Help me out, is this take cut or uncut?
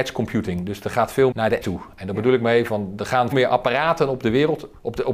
cut